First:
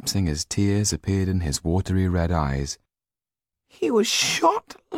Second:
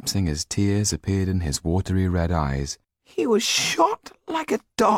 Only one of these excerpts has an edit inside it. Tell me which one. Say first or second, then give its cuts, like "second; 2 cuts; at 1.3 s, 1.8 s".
second; 1 cut; at 2.8 s